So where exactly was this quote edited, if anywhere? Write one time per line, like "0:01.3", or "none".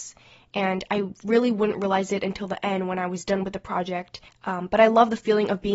0:04.3